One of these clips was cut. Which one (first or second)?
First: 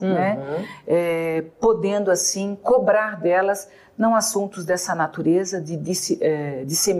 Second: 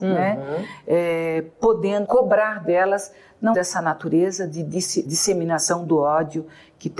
second